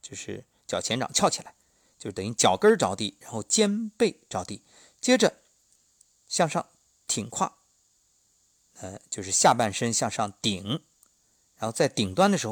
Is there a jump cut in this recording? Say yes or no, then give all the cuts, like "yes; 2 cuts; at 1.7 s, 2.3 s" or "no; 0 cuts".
no; 0 cuts